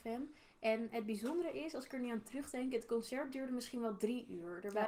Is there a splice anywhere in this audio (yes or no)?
no